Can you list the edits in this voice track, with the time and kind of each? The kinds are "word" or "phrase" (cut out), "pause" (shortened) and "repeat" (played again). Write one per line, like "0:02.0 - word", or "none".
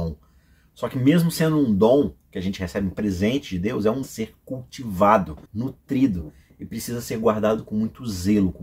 0:04.0 - phrase
0:05.5 - pause